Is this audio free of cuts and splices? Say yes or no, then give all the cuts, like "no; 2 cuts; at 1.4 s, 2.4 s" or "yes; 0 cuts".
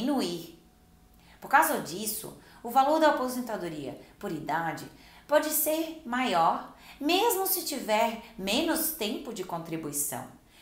yes; 0 cuts